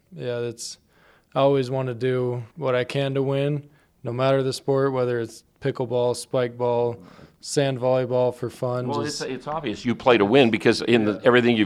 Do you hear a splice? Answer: yes; 1 cut; at 2.5 s

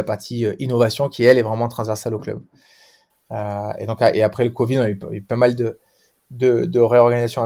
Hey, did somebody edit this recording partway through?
no; 0 cuts

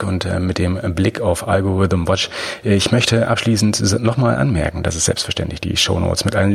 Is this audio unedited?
yes; 0 cuts

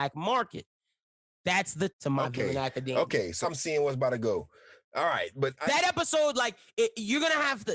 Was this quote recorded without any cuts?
no; 2 cuts; at 1.9 s, 3.4 s

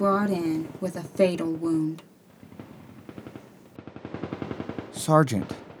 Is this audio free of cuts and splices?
yes; 0 cuts

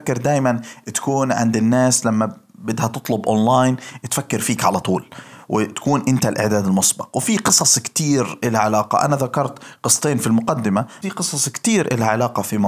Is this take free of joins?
no; 1 cut; at 11.0 s

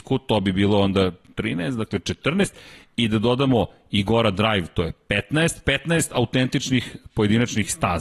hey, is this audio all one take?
yes; 0 cuts

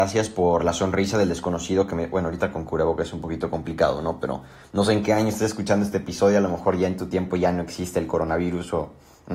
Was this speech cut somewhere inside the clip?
no; 0 cuts

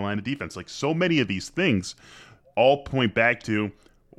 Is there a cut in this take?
no; 0 cuts

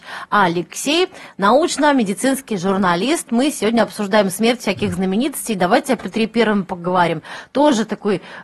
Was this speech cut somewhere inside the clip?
yes; 1 cut; at 3.3 s

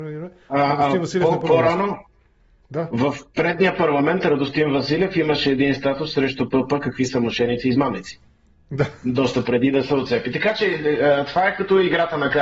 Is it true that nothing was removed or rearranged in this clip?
yes; 0 cuts

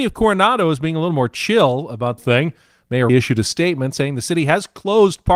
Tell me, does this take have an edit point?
yes; 2 cuts; at 2.2 s, 3.1 s

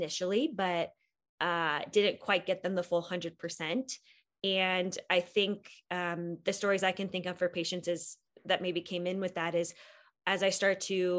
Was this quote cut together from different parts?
no; 0 cuts

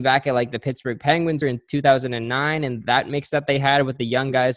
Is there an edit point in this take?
yes; 1 cut; at 1.4 s

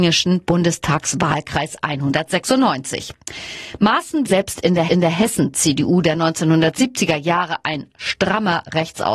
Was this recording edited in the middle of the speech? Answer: yes; 2 cuts; at 4.3 s, 4.9 s

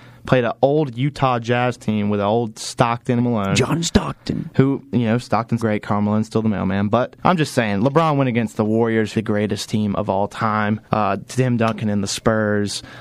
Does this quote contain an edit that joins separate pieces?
yes; 5 cuts; at 3.2 s, 5.6 s, 7.2 s, 9.1 s, 10.8 s

